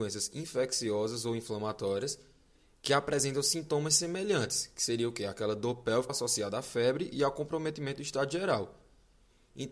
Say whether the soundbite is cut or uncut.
cut